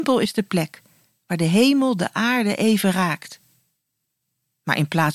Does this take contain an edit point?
no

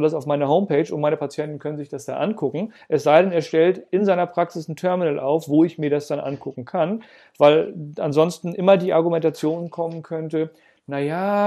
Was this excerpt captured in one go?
yes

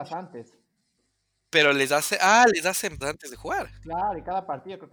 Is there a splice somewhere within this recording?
yes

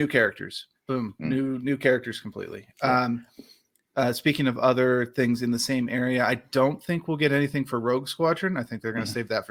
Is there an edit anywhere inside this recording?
no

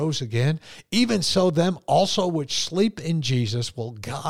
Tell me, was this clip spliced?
no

